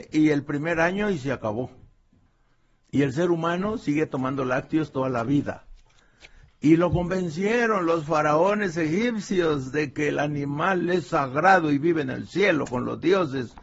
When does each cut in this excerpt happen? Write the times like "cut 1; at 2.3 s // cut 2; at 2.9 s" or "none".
none